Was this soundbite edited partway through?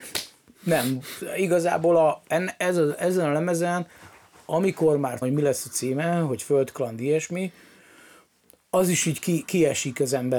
yes; 1 cut; at 5.2 s

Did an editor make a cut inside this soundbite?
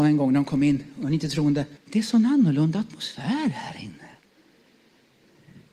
yes; 1 cut; at 1.8 s

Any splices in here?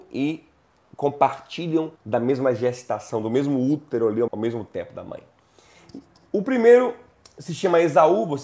yes; 2 cuts; at 2.0 s, 4.3 s

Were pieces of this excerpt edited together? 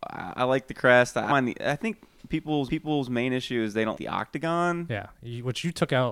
yes; 3 cuts; at 1.3 s, 2.7 s, 3.9 s

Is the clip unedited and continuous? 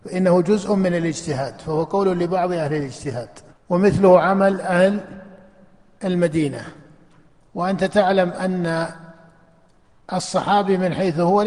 no; 1 cut; at 3.5 s

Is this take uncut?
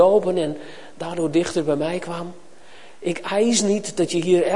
yes; 0 cuts

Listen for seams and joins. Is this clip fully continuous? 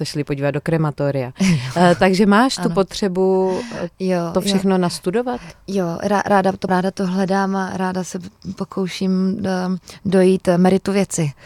no; 1 cut; at 6.7 s

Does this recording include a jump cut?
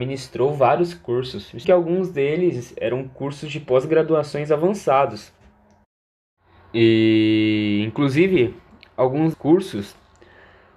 yes; 2 cuts; at 1.6 s, 9.3 s

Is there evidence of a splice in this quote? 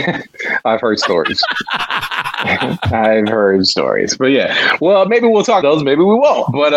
yes; 1 cut; at 5.6 s

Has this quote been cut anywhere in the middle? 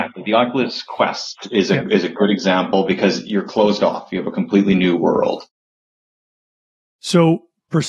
no; 0 cuts

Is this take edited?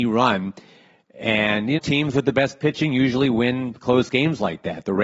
yes; 1 cut; at 1.8 s

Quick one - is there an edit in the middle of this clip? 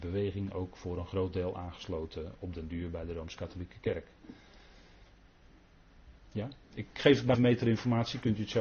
yes; 2 cuts; at 6.6 s, 7.3 s

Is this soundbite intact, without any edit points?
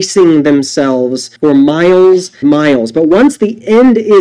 no; 2 cuts; at 1.4 s, 2.4 s

